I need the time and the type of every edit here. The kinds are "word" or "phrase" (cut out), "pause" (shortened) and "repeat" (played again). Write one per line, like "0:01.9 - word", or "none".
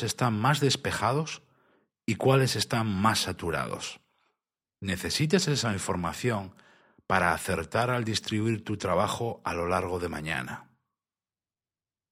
none

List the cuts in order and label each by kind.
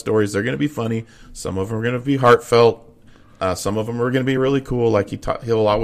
none

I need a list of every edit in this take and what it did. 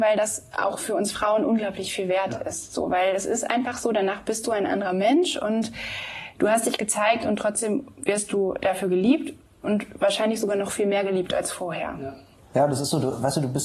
none

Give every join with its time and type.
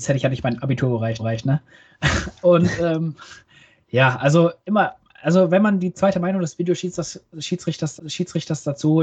0:01.2 - repeat
0:04.6 - pause
0:08.0 - repeat

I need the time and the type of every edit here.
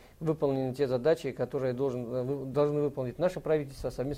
none

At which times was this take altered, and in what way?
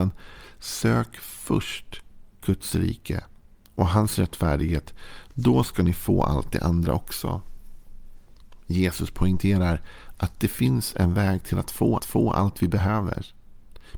0:12.0 - repeat

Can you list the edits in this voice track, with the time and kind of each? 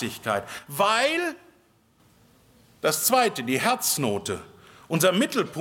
none

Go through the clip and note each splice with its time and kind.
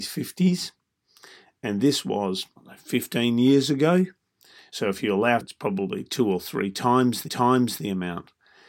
0:02.6 - pause
0:05.4 - phrase
0:07.3 - repeat

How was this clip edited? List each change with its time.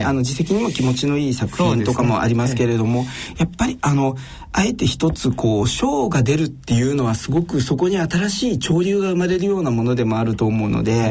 none

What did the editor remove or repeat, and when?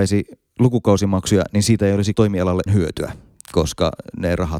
0:02.1 - word
0:02.7 - phrase

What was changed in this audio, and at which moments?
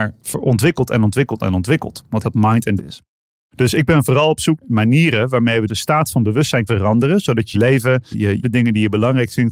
0:02.2 - phrase
0:02.8 - word
0:04.6 - word
0:05.7 - word
0:06.7 - word
0:07.5 - word
0:08.1 - word
0:08.4 - phrase

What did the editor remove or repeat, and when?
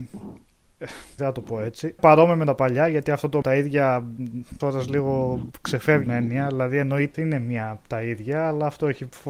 0:01.2 - word
0:02.0 - word
0:03.4 - phrase
0:04.6 - word
0:06.1 - word
0:07.1 - phrase

